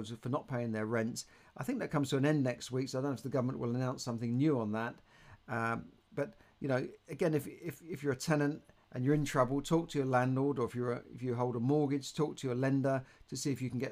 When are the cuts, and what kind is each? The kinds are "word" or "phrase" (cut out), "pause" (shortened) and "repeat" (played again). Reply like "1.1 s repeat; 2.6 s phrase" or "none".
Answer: none